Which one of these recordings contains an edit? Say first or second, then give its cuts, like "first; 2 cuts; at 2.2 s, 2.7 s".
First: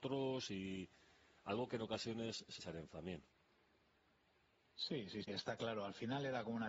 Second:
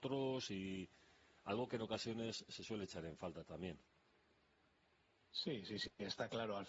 first; 3 cuts; at 2.6 s, 2.9 s, 5.2 s